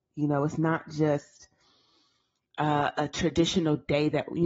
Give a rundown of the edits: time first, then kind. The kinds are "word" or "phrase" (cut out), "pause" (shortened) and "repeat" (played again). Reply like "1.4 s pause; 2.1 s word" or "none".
none